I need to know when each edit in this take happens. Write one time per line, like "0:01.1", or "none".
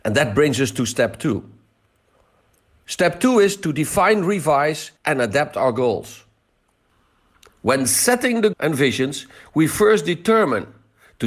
0:05.0
0:08.5